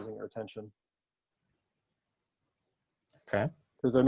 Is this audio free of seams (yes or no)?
yes